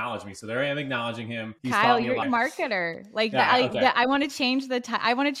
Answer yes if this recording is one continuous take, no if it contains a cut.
no